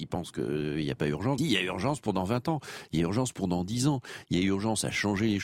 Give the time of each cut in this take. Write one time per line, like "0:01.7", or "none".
0:01.4